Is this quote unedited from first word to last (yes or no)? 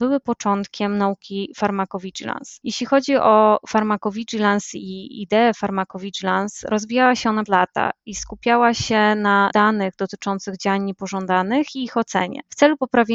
no